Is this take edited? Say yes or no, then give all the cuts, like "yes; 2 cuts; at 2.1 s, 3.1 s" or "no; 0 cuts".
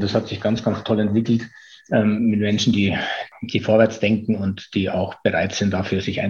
no; 0 cuts